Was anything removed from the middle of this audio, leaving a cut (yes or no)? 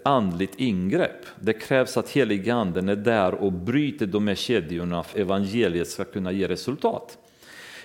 yes